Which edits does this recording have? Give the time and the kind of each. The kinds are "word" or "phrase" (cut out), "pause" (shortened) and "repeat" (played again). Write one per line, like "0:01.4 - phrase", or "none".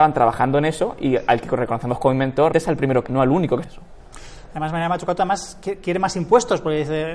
0:02.5 - word
0:03.1 - word
0:03.6 - phrase